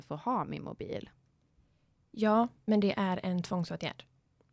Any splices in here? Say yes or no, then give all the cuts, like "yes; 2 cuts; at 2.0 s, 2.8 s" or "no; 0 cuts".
no; 0 cuts